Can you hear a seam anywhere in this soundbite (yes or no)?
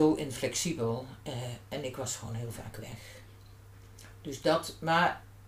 no